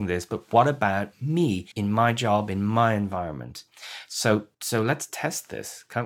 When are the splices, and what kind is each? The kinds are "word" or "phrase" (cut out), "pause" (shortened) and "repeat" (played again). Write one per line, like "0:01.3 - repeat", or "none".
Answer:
0:01.7 - pause
0:04.5 - pause